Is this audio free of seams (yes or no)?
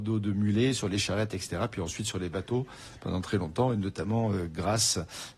yes